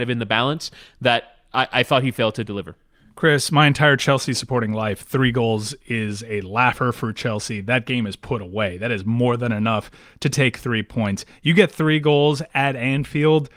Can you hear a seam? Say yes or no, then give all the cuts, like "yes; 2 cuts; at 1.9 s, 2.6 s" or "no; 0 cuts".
no; 0 cuts